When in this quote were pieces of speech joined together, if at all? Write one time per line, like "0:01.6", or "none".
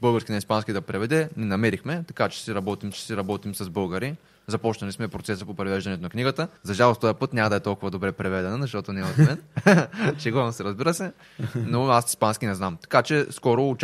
0:02.9
0:06.6